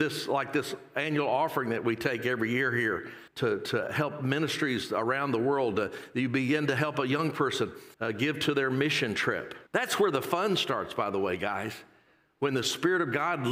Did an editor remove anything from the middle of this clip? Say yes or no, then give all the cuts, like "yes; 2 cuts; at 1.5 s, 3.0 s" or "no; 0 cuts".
yes; 3 cuts; at 3.3 s, 7.9 s, 9.7 s